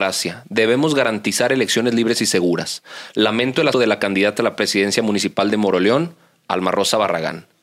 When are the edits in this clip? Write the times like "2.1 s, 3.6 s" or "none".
3.7 s